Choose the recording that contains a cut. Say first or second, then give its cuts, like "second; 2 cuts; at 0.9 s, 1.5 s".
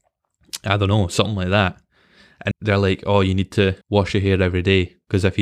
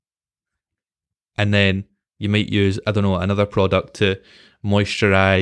first; 2 cuts; at 2.5 s, 3.8 s